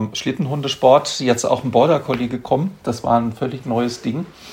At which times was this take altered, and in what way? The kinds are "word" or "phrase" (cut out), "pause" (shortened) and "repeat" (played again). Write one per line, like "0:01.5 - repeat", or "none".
none